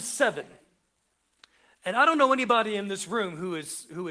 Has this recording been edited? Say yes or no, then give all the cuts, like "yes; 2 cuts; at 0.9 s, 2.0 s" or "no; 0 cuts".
no; 0 cuts